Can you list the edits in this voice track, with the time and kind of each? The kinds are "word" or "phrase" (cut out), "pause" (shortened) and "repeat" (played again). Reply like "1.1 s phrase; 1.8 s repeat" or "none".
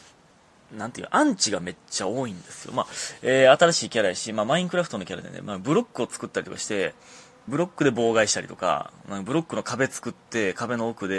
7.5 s phrase

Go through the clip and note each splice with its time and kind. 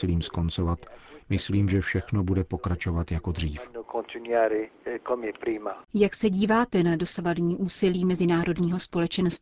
none

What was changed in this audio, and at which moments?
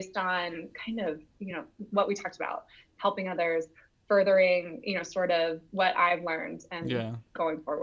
none

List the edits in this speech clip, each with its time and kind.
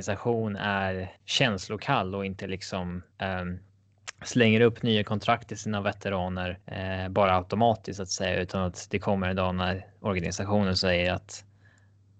1.2 s pause; 3.1 s pause; 6.6 s pause

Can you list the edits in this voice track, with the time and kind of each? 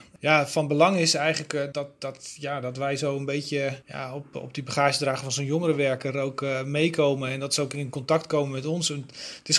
1.7 s word; 3.8 s pause

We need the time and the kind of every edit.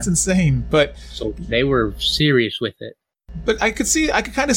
none

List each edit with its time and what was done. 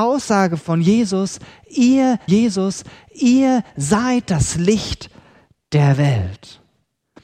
2.3 s repeat

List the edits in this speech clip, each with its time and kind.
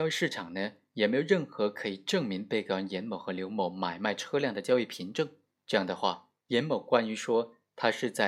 5.5 s pause; 6.4 s pause

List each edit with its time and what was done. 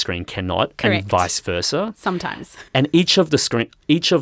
2.7 s pause

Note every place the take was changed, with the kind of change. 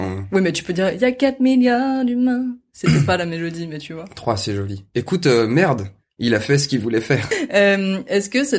none

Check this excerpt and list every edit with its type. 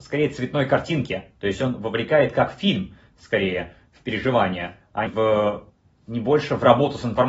5.1 s word

